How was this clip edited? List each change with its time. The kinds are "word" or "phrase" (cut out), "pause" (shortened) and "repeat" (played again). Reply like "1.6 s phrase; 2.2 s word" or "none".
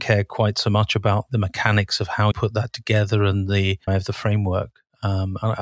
1.3 s word; 2.3 s word; 3.9 s word